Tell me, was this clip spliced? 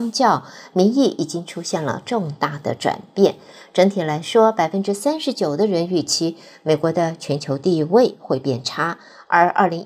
no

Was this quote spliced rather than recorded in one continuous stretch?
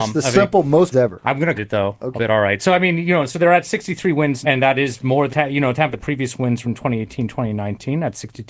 yes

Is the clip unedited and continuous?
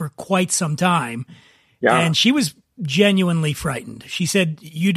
yes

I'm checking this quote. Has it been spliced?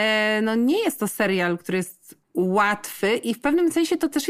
yes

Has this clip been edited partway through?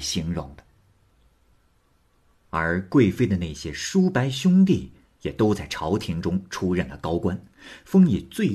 no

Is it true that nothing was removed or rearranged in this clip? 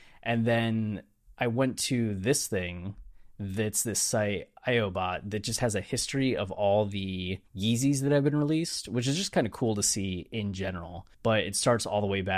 no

